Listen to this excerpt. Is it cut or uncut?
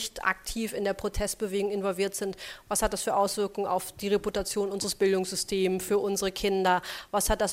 uncut